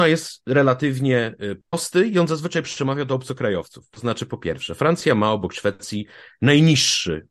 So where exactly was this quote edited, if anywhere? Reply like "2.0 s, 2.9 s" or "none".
none

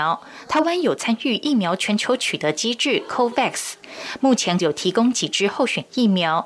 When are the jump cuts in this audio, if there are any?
4.6 s

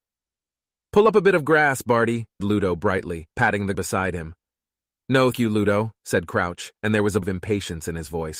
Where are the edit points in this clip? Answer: 2.4 s, 3.3 s, 3.7 s, 5.3 s, 6.0 s, 6.8 s, 7.2 s

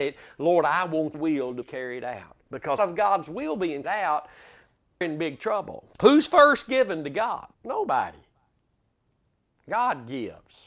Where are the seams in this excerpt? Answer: 1.1 s, 1.6 s, 2.8 s, 3.8 s, 5.0 s, 5.9 s, 7.5 s

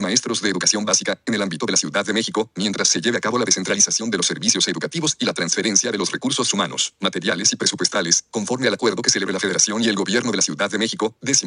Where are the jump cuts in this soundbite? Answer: none

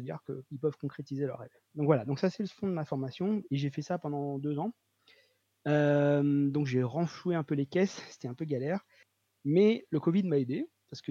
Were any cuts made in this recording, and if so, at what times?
none

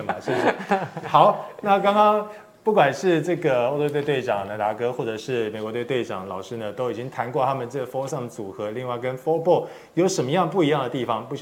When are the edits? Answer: none

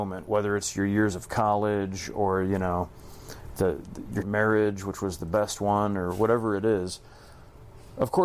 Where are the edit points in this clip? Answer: 4.2 s

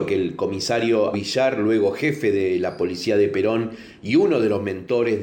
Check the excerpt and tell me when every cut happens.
1.1 s

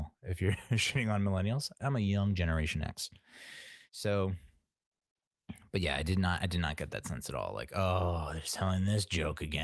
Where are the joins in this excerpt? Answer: 1.8 s, 3.8 s

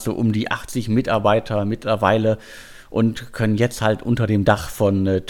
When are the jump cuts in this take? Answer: none

